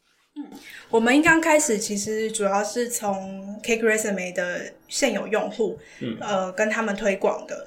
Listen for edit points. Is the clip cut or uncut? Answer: uncut